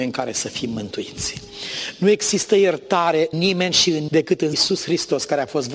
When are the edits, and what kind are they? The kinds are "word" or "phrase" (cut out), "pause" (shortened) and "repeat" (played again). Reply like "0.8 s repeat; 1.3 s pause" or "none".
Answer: 3.3 s word; 4.1 s word; 4.5 s phrase